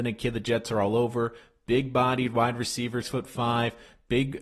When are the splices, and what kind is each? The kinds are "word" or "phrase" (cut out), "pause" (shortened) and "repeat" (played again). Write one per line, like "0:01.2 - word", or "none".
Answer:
0:03.0 - word